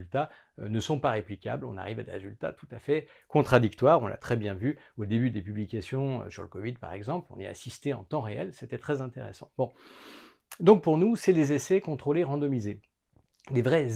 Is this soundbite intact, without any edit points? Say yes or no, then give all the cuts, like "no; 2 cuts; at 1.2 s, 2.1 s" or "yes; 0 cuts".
yes; 0 cuts